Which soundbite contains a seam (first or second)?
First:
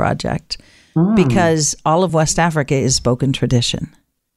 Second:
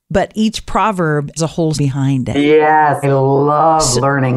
second